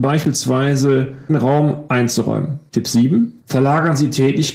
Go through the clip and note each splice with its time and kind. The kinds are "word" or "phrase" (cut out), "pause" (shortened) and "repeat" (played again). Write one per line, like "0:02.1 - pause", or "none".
0:01.3 - phrase